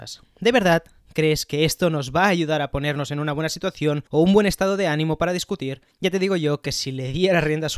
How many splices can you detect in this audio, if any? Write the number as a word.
zero